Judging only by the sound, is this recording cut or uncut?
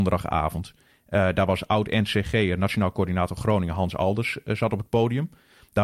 uncut